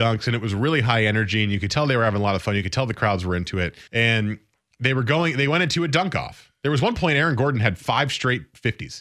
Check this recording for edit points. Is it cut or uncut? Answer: cut